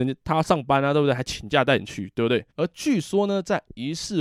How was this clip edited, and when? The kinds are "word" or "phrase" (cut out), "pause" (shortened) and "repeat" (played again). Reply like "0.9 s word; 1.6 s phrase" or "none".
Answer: 2.5 s pause